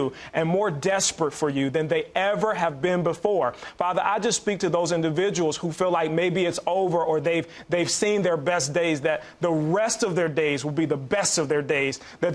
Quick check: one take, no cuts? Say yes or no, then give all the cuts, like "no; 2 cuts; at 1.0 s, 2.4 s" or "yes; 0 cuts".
yes; 0 cuts